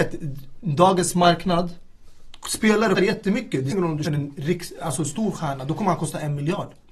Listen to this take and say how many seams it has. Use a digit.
3